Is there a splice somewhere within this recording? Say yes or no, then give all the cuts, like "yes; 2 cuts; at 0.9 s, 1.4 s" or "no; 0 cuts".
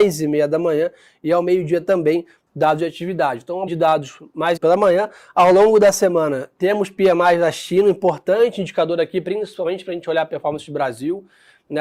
yes; 2 cuts; at 3.7 s, 4.6 s